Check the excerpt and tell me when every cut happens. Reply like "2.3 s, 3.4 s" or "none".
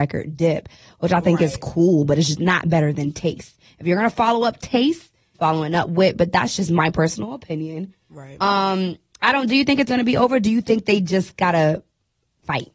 5.3 s, 9.9 s